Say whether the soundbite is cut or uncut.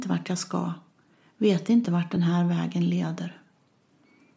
uncut